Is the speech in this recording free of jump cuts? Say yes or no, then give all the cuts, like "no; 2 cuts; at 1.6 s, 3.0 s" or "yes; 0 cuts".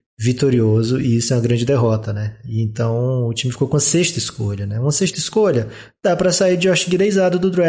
yes; 0 cuts